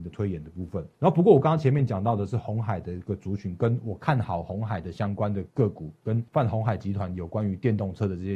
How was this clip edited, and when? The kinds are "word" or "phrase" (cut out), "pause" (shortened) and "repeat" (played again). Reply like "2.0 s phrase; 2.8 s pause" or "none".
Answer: 0.9 s pause; 6.3 s pause

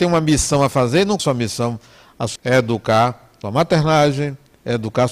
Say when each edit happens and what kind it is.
1.2 s word; 2.4 s word; 3.4 s word

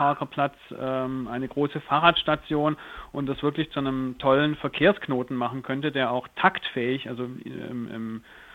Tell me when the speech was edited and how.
none

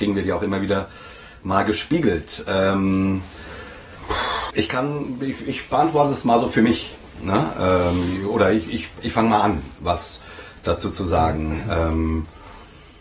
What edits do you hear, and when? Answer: 4.5 s word

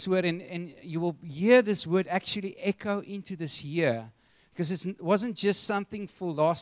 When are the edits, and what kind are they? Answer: none

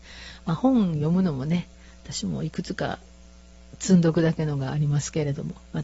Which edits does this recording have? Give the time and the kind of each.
none

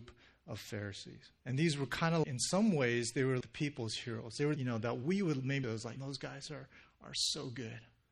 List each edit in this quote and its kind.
1.4 s pause; 2.2 s word; 3.4 s word; 4.6 s phrase; 5.6 s phrase; 6.0 s word

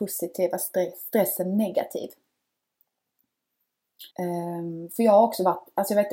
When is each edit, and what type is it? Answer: 4.1 s pause

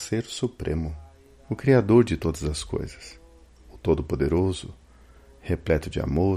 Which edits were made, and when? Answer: none

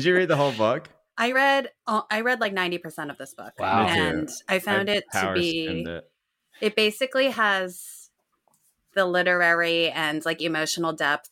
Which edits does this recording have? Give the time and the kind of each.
none

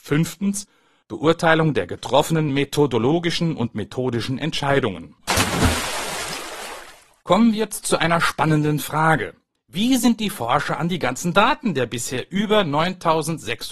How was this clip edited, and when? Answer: none

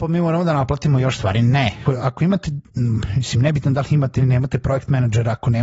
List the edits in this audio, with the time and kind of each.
1.9 s word; 4.2 s word

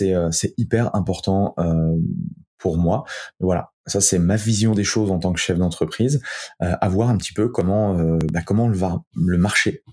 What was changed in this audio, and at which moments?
none

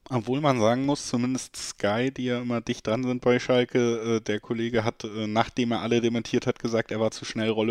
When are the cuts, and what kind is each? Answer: none

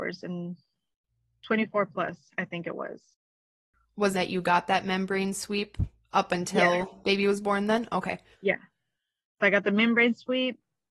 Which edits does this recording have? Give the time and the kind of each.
4.1 s phrase; 8.3 s pause

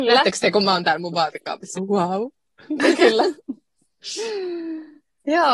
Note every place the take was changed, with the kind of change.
1.7 s word

